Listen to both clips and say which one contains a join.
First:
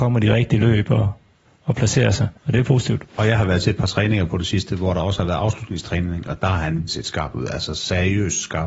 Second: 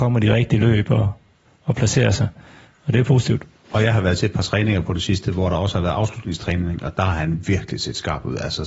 first; 3 cuts; at 2.4 s, 3.1 s, 6.9 s

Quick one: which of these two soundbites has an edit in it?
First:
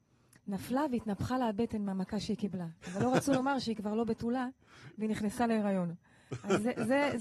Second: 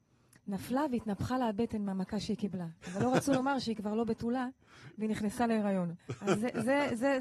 second; 1 cut; at 6.0 s

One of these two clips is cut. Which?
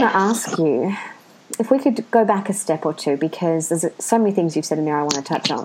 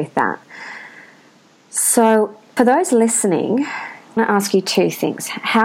second; 2 cuts; at 2.6 s, 4.2 s

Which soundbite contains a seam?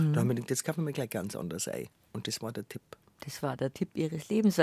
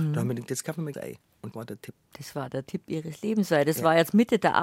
second; 3 cuts; at 0.9 s, 1.5 s, 2.0 s

